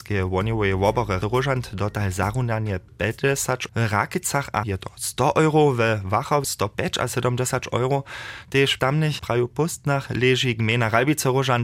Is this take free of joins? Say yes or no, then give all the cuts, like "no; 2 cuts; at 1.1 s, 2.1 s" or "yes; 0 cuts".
no; 6 cuts; at 1.2 s, 3.7 s, 4.6 s, 6.4 s, 8.8 s, 9.2 s